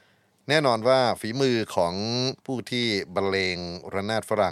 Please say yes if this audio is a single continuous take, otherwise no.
no